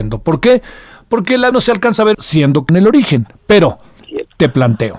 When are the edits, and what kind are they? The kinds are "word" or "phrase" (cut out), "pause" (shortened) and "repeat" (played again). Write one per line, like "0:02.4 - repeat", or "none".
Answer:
0:01.5 - word
0:02.1 - phrase
0:02.7 - word